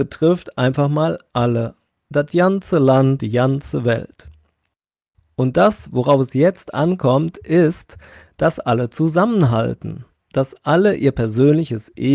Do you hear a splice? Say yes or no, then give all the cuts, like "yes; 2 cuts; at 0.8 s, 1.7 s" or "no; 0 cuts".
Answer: yes; 1 cut; at 3.2 s